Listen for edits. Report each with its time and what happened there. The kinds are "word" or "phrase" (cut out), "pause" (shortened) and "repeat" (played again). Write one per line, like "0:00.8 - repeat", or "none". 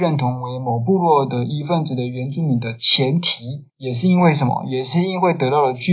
0:03.7 - pause